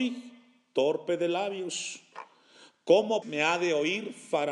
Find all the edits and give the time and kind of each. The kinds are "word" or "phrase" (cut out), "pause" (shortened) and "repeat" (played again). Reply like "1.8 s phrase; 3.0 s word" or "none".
3.2 s word